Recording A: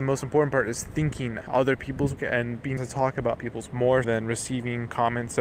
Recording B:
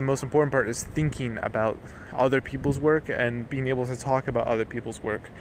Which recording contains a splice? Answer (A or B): A